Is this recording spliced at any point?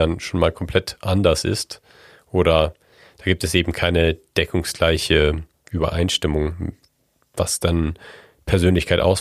no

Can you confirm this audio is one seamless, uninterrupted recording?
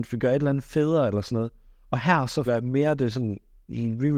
no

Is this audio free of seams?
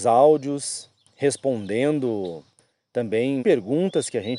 no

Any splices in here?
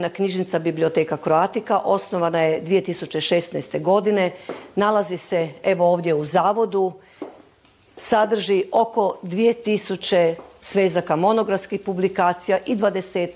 no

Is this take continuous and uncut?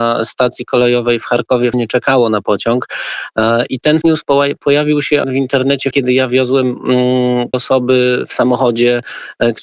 no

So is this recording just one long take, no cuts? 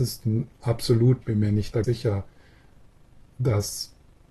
no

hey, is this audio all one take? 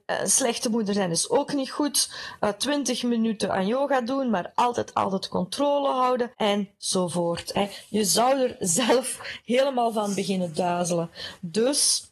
no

